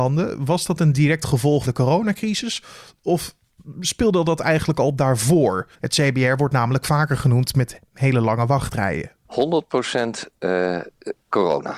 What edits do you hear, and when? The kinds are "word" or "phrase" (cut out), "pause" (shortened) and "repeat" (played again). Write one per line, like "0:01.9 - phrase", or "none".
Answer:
0:01.6 - word
0:05.7 - pause